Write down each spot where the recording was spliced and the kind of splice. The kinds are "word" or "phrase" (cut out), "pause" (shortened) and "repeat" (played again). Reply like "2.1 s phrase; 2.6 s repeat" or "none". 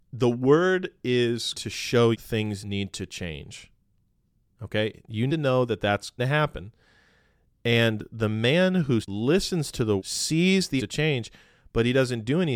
1.5 s word; 2.1 s word; 2.6 s word; 5.3 s word; 6.2 s word; 9.0 s word; 10.0 s word; 10.8 s word